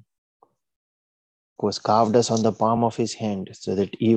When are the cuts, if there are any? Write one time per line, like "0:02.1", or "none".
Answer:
none